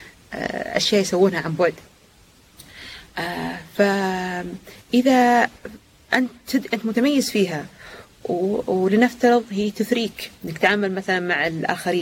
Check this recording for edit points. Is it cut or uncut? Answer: uncut